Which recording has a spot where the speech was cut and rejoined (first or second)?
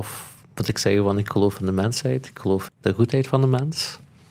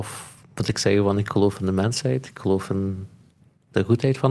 first